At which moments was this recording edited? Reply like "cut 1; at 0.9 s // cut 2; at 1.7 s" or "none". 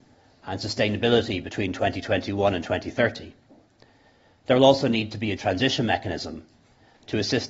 cut 1; at 5.4 s